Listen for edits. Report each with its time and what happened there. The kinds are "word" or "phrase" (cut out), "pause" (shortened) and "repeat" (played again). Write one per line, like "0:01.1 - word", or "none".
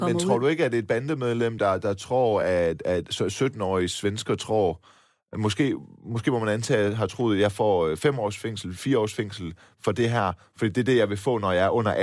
none

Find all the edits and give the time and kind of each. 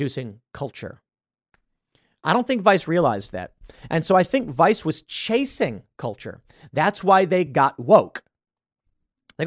none

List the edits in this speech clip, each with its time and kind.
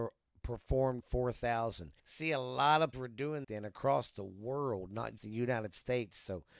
0:01.0 - word
0:02.0 - pause
0:02.9 - word
0:03.4 - phrase
0:05.2 - word

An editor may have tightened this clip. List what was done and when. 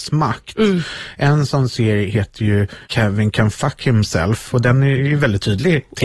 0:02.8 - pause

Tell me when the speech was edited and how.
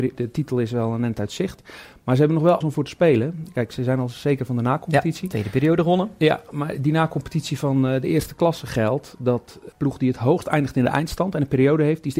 0:02.6 - word
0:09.7 - word

